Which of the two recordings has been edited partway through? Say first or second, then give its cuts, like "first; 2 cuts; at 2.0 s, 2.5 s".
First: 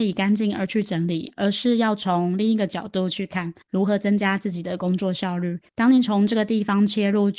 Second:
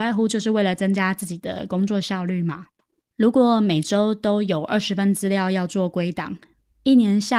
first; 2 cuts; at 3.6 s, 5.7 s